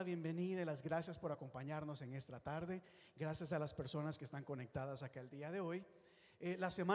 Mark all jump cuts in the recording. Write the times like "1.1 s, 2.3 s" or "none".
none